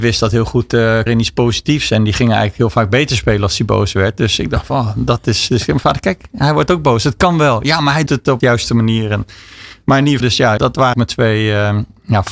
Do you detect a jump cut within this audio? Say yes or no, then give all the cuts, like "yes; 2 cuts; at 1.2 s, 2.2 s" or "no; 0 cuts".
yes; 6 cuts; at 1.1 s, 8.1 s, 8.4 s, 10.2 s, 10.6 s, 10.9 s